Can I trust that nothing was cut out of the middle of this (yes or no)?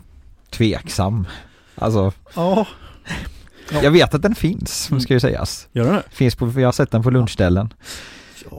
yes